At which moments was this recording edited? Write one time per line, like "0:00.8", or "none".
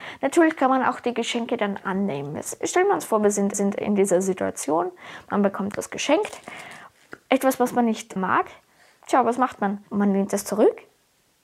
0:02.6
0:03.5
0:05.7
0:08.2
0:09.9